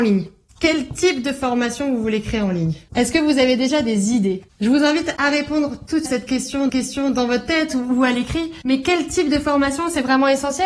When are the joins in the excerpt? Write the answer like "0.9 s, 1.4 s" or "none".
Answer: 6.1 s, 6.7 s